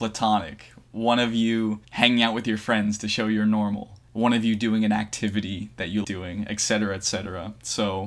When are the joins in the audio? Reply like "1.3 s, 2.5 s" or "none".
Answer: 6.0 s